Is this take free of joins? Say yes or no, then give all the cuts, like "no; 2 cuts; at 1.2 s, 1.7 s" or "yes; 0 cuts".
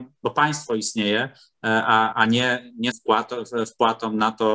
no; 2 cuts; at 2.1 s, 2.9 s